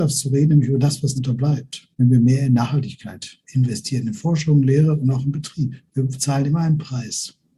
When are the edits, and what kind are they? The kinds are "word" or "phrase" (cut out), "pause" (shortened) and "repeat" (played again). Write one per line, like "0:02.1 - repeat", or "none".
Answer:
0:01.2 - word
0:01.9 - pause
0:03.4 - pause
0:05.9 - pause